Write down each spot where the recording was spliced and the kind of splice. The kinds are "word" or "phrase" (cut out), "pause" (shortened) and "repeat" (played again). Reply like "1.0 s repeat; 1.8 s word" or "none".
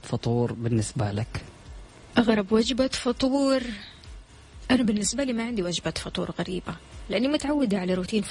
none